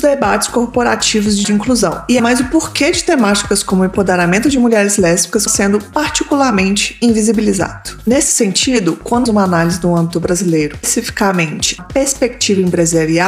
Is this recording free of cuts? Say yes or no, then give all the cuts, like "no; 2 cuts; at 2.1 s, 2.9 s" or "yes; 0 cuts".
no; 6 cuts; at 1.4 s, 2.2 s, 5.5 s, 9.3 s, 10.8 s, 11.8 s